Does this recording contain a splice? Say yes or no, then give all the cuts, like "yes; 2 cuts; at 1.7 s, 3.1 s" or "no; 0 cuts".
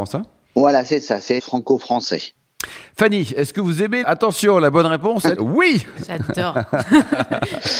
yes; 3 cuts; at 1.4 s, 4.0 s, 5.4 s